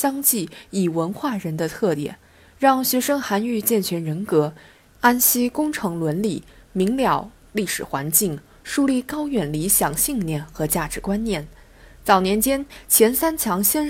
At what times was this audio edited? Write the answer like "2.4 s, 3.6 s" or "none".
none

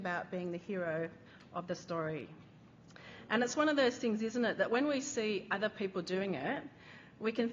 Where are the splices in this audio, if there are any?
none

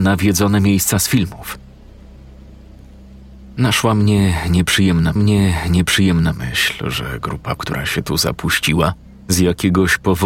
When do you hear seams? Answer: 5.2 s, 7.6 s, 9.1 s

